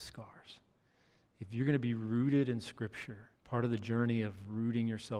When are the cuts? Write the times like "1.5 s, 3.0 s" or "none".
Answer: 3.4 s